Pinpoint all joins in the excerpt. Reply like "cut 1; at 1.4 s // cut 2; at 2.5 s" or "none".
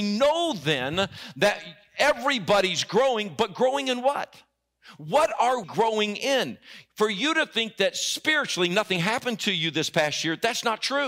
cut 1; at 5.6 s